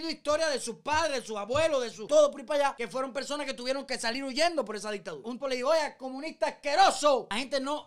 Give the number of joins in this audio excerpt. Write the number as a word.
one